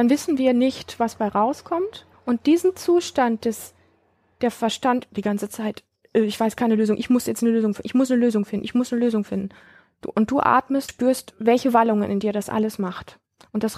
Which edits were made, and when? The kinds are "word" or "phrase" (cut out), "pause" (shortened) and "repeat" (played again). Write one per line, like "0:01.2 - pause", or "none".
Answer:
0:02.1 - pause
0:05.1 - word
0:09.7 - pause
0:10.9 - word

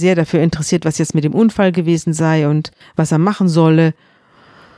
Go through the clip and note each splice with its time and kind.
0:02.8 - pause

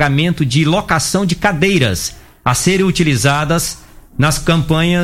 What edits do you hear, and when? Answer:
none

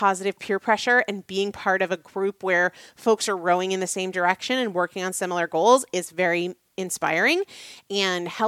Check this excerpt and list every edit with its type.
none

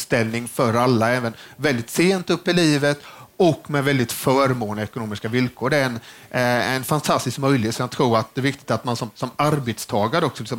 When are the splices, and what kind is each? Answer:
none

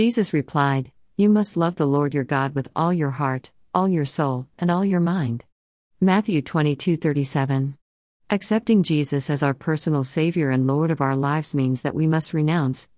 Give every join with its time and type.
none

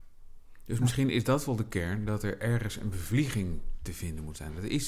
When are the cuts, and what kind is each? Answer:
none

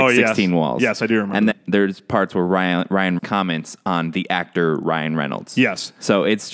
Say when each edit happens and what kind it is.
0:01.5 - word
0:03.2 - word

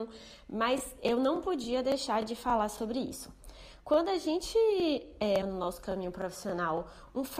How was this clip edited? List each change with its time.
0:05.4 - word

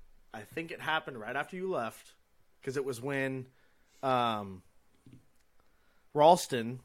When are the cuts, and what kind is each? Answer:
none

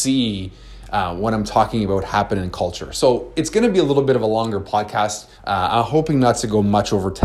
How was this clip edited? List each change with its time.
0:05.3 - pause

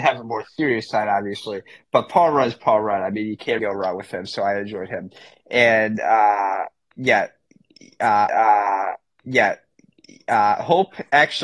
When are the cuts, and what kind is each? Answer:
0:03.6 - word
0:08.3 - repeat

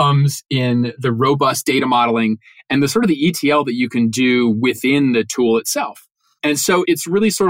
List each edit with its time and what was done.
none

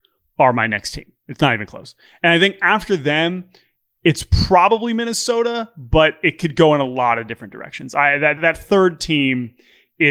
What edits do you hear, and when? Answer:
0:08.4 - word

